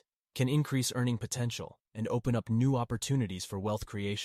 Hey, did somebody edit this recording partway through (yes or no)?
no